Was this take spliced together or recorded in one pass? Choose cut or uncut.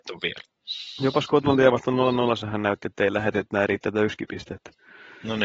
cut